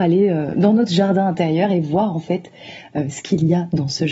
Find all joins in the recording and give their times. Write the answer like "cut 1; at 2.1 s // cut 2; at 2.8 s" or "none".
none